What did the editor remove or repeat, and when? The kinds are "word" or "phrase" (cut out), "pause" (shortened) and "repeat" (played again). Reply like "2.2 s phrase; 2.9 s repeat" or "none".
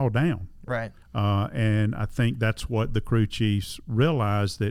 1.0 s pause